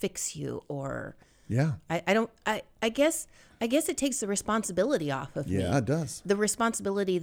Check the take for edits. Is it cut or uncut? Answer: uncut